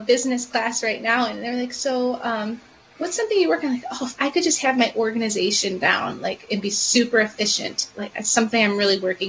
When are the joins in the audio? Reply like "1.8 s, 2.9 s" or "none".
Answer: none